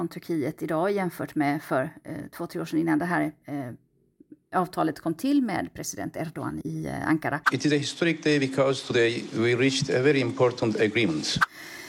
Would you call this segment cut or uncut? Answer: cut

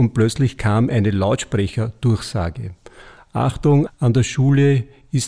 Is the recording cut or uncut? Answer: cut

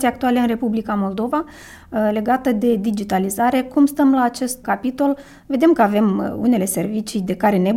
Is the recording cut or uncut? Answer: cut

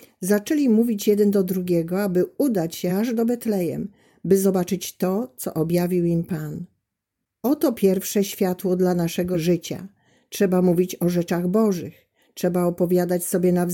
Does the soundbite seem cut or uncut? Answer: uncut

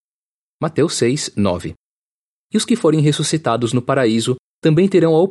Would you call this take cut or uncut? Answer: uncut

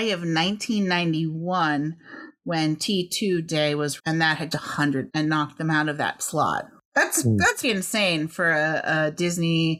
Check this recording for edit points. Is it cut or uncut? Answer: cut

